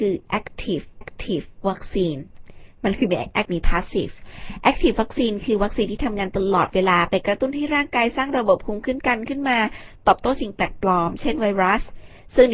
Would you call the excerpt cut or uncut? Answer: cut